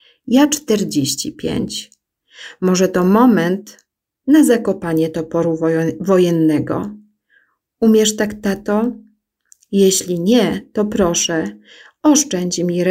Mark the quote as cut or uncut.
uncut